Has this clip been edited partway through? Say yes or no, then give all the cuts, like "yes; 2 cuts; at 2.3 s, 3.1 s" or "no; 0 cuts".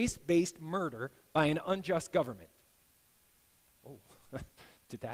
no; 0 cuts